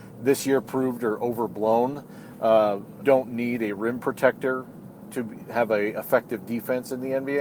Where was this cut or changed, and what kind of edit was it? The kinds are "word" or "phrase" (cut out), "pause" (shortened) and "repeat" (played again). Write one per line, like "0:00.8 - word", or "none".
0:03.0 - word
0:05.1 - word